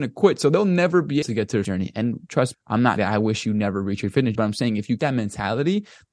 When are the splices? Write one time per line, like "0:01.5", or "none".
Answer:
0:01.2
0:01.6
0:02.5
0:03.0
0:04.3
0:05.0

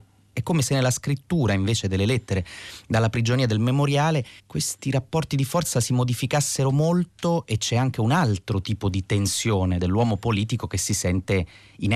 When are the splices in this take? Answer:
0:04.4

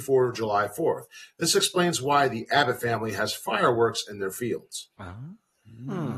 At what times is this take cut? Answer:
0:04.9

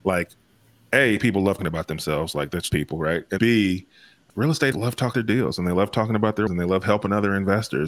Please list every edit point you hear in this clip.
0:01.6
0:02.7
0:03.4
0:04.7
0:05.1
0:06.5

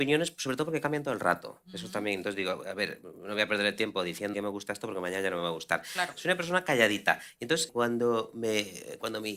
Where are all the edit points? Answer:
0:04.3
0:07.7

